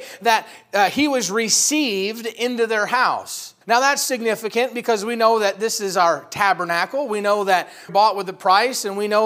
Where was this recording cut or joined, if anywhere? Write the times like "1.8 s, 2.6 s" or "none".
3.6 s, 7.9 s

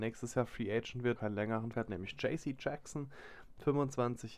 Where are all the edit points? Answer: 1.2 s, 1.7 s

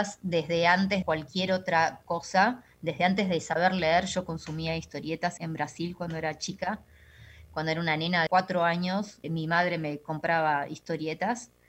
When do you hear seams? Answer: 1.0 s, 5.4 s, 8.3 s, 9.2 s

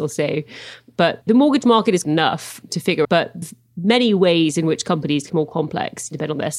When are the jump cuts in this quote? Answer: 2.0 s, 3.0 s, 3.4 s, 5.3 s

